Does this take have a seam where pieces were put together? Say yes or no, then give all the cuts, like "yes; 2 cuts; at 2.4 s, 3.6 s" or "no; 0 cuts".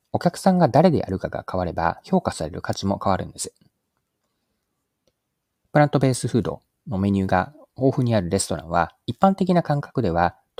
no; 0 cuts